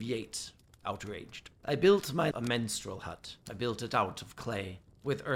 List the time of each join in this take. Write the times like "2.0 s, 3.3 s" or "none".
1.6 s, 2.3 s, 3.4 s